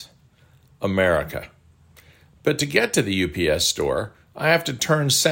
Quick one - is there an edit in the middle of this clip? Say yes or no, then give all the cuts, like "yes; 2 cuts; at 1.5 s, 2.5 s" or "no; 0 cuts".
no; 0 cuts